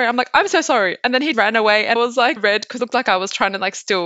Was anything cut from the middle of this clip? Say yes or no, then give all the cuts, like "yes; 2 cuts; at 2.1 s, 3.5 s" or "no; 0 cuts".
yes; 4 cuts; at 1.3 s, 2.0 s, 2.4 s, 2.8 s